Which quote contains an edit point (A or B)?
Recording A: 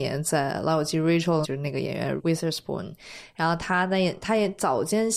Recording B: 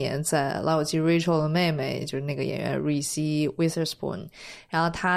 A